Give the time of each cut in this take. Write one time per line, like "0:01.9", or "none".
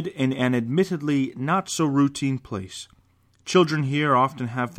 none